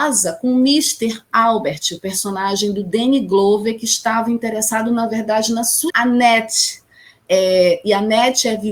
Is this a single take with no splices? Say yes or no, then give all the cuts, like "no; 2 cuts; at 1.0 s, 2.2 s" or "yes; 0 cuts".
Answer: no; 1 cut; at 5.9 s